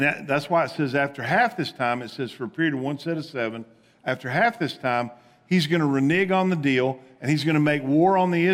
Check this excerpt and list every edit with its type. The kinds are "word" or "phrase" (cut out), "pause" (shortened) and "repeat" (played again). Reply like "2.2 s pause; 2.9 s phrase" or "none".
none